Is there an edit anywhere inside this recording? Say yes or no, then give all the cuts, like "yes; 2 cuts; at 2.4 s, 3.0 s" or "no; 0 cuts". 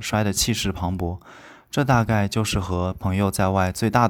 no; 0 cuts